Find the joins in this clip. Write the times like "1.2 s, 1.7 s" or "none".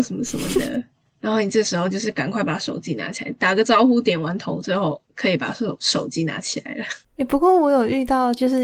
7.0 s